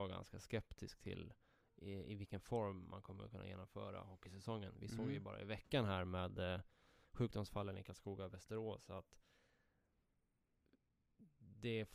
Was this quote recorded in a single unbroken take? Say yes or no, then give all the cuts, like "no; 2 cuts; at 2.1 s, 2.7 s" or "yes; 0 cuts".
yes; 0 cuts